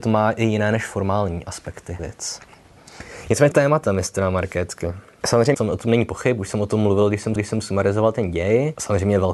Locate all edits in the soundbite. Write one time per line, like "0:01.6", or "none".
0:02.0
0:03.5
0:05.5
0:07.4